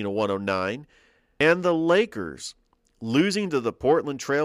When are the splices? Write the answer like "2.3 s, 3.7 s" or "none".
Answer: none